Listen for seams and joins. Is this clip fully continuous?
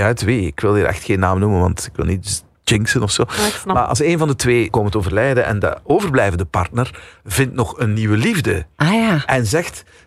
no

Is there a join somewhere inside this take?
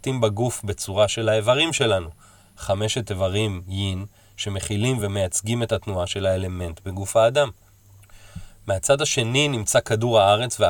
no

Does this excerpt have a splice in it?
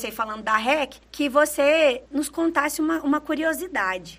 yes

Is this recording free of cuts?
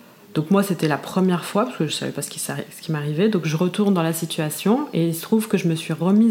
yes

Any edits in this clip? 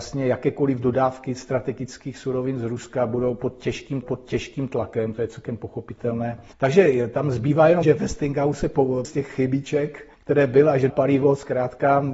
yes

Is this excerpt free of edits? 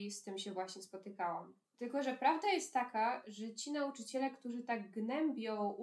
yes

